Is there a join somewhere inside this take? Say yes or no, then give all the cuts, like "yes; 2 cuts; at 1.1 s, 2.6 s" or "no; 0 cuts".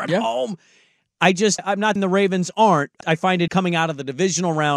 yes; 4 cuts; at 1.6 s, 2.0 s, 3.0 s, 3.5 s